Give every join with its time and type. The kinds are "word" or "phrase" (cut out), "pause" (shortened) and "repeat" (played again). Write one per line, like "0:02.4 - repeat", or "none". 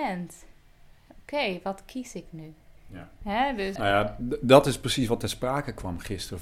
0:02.8 - pause
0:03.8 - word